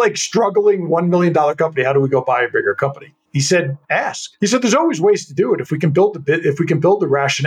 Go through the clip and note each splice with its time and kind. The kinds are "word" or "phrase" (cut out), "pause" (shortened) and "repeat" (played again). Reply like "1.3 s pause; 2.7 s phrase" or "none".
none